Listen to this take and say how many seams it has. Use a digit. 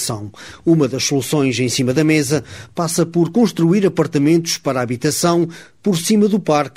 0